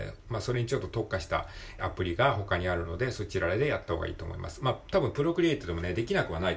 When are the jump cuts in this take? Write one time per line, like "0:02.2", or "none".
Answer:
0:01.8